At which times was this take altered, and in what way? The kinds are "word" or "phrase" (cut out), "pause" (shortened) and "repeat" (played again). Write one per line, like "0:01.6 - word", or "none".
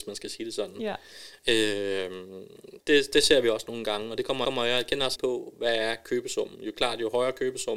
0:02.8 - word
0:04.4 - repeat
0:05.2 - word